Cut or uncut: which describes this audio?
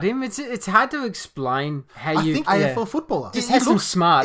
cut